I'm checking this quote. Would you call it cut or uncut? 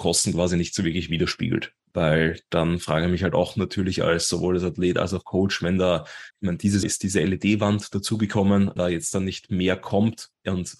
cut